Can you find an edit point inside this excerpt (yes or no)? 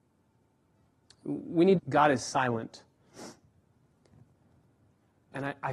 yes